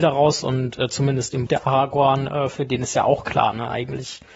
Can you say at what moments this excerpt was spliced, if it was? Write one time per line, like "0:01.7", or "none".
0:01.5

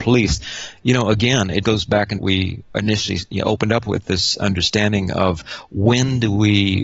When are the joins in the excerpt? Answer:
0:01.6
0:02.2
0:03.3

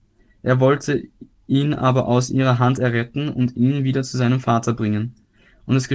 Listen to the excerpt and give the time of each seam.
none

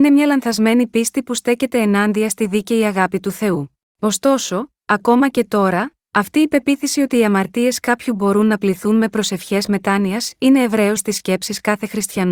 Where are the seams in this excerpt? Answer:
0:03.9
0:11.0

